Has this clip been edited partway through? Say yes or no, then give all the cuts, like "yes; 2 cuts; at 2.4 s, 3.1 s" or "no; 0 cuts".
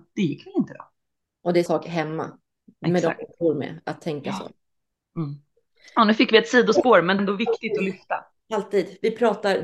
yes; 2 cuts; at 1.7 s, 7.2 s